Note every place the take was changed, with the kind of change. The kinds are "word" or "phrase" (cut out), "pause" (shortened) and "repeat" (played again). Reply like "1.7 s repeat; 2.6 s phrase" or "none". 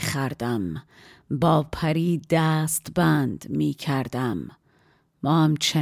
none